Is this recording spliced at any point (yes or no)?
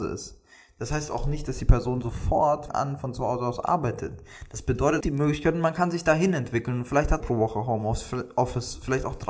yes